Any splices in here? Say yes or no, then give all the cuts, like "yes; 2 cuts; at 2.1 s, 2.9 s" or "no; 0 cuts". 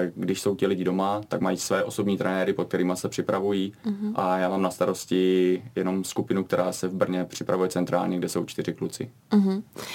no; 0 cuts